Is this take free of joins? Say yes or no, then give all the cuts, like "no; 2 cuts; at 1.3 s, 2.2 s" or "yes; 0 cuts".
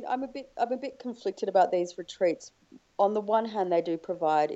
yes; 0 cuts